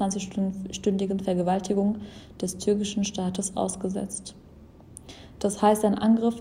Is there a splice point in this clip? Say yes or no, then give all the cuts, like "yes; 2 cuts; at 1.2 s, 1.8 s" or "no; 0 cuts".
no; 0 cuts